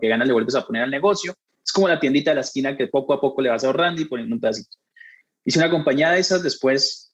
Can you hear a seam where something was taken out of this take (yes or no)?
no